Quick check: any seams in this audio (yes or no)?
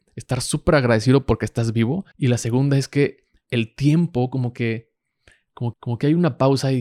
yes